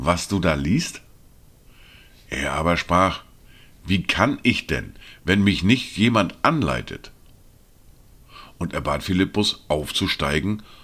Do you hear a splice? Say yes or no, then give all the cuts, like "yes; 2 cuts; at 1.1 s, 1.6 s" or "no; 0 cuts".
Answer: no; 0 cuts